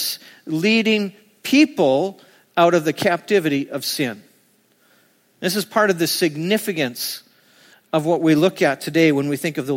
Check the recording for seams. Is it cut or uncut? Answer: uncut